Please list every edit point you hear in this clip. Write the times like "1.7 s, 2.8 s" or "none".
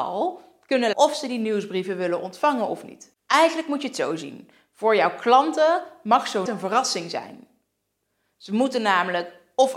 0.9 s, 6.5 s